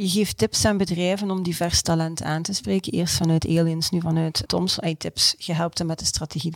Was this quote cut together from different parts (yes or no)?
yes